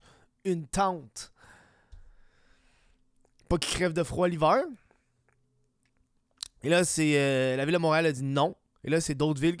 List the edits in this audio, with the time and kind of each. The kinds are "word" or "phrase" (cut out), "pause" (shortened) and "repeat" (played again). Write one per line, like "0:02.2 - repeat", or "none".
none